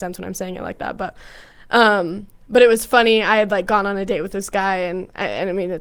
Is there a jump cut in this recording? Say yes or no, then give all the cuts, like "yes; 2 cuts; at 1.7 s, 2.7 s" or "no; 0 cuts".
no; 0 cuts